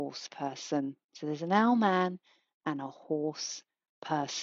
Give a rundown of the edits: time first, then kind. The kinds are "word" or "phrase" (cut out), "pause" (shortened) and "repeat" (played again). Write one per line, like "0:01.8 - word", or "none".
none